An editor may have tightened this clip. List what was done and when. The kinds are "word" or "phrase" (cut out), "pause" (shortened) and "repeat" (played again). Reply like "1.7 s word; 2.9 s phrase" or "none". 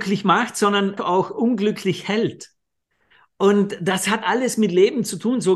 1.0 s word; 4.2 s word